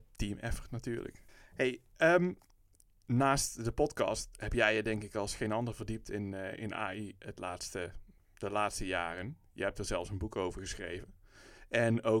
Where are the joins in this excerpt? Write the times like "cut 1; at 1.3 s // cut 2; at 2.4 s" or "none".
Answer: none